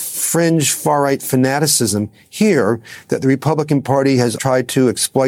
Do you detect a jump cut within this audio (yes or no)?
yes